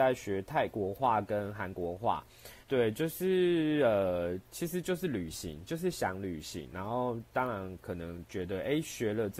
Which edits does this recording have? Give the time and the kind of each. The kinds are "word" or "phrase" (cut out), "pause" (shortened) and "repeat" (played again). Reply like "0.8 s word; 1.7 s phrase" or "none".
2.6 s pause